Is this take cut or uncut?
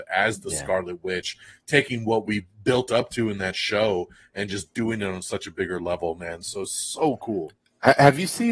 uncut